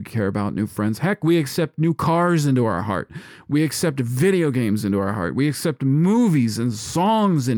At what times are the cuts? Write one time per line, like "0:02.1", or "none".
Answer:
none